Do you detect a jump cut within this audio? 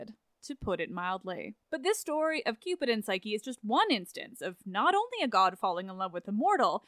yes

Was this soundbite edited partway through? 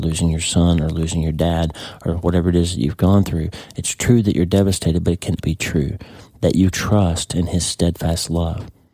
yes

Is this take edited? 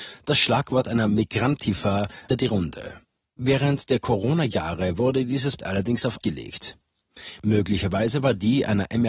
yes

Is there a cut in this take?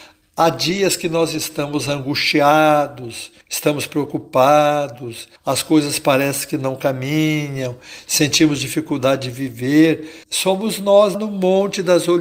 yes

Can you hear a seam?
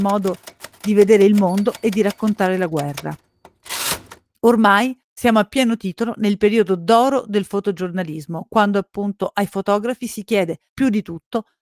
no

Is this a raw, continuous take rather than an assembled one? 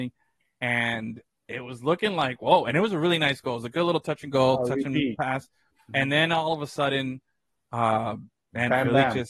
yes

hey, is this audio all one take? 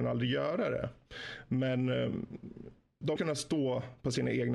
no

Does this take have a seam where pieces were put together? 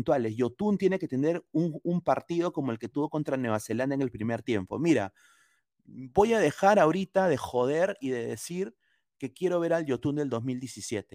no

